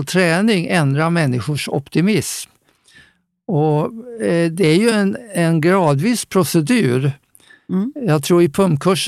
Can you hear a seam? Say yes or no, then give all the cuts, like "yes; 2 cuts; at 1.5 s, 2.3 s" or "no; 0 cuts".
no; 0 cuts